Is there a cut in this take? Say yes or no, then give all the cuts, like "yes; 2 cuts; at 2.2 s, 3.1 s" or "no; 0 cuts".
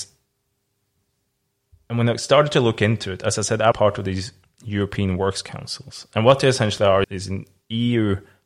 yes; 2 cuts; at 3.7 s, 7.0 s